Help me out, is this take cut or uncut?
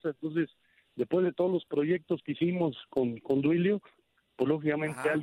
uncut